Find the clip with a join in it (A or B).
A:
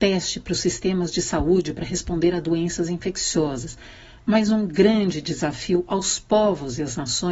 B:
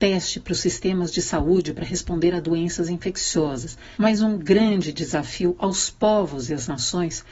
B